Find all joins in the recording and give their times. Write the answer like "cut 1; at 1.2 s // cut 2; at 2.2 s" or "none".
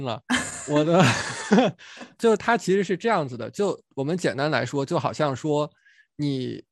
cut 1; at 2.2 s // cut 2; at 3.9 s